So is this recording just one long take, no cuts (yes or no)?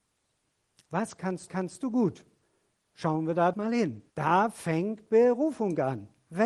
no